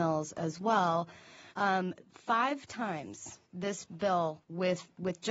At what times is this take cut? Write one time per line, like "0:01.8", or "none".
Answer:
0:01.5
0:03.4